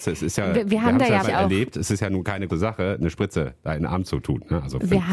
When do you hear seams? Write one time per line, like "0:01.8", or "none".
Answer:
0:01.2
0:02.5